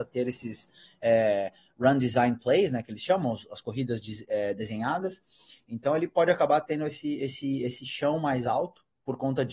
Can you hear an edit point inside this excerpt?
no; 0 cuts

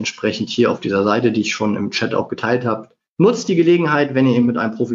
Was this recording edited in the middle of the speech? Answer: yes; 1 cut; at 3.1 s

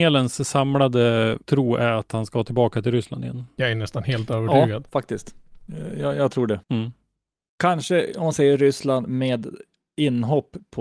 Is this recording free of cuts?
no; 2 cuts; at 1.4 s, 6.6 s

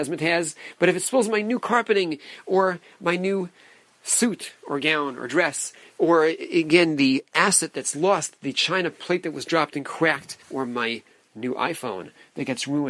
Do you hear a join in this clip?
yes; 1 cut; at 10.4 s

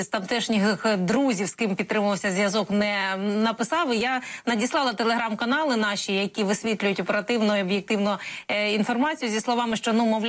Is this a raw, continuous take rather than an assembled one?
yes; 0 cuts

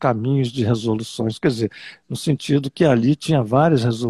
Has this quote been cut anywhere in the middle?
no; 0 cuts

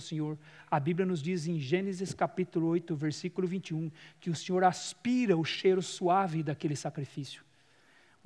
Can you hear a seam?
no; 0 cuts

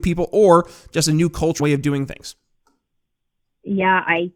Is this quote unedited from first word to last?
no; 1 cut; at 1.6 s

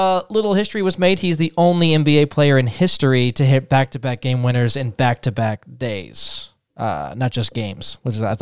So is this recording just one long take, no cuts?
yes; 0 cuts

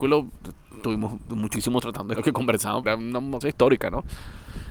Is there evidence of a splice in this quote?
yes; 4 cuts; at 1.8 s, 2.2 s, 2.8 s, 3.4 s

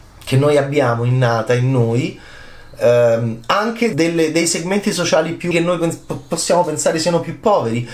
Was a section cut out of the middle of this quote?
yes; 2 cuts; at 3.9 s, 5.5 s

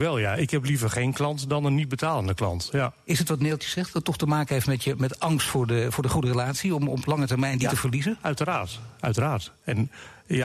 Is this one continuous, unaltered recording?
yes; 0 cuts

